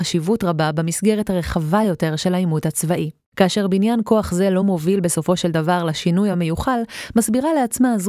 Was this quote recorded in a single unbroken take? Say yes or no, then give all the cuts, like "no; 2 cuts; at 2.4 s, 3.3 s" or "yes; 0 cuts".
yes; 0 cuts